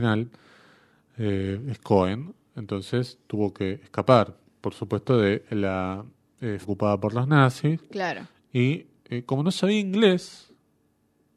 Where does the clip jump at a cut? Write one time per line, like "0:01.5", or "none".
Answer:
0:06.6